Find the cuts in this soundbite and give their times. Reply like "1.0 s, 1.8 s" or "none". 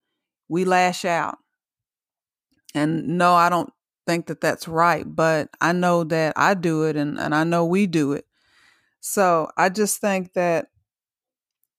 none